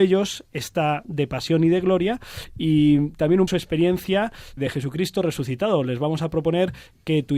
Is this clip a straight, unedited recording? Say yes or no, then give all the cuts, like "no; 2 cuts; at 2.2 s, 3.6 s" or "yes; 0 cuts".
no; 3 cuts; at 1.0 s, 3.5 s, 4.6 s